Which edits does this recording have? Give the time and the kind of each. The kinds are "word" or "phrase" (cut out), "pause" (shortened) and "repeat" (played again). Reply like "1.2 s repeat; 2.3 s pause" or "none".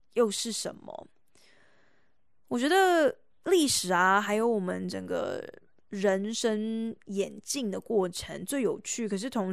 none

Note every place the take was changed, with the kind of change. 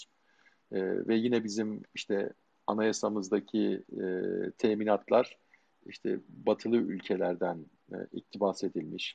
none

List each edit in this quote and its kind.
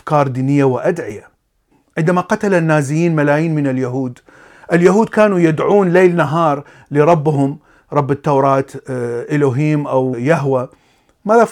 none

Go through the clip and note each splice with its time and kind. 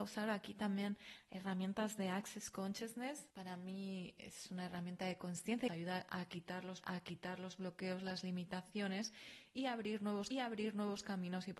3.3 s pause; 5.7 s phrase; 6.8 s repeat; 10.3 s repeat

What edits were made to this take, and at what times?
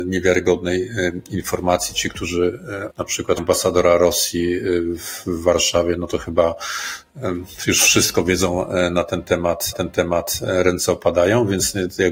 2.9 s word; 3.4 s phrase; 9.7 s repeat

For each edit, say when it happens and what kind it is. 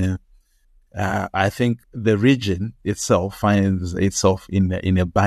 1.8 s pause

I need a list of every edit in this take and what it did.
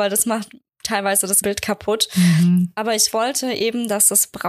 1.4 s word

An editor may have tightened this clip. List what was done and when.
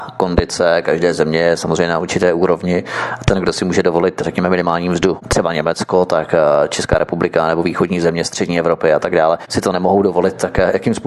none

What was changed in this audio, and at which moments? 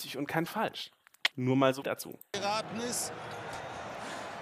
1.3 s pause; 1.8 s word

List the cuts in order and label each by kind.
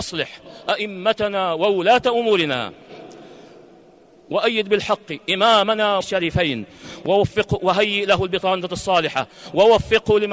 6.0 s phrase

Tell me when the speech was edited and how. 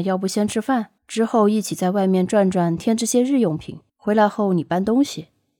1.0 s pause; 3.9 s pause

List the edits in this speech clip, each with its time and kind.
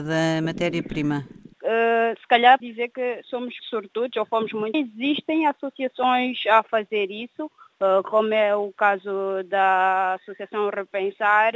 1.5 s pause; 2.6 s word; 3.6 s word; 4.7 s phrase

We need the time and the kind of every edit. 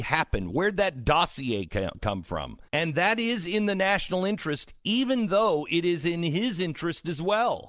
2.7 s pause

